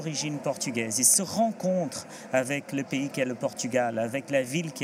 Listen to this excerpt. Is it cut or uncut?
uncut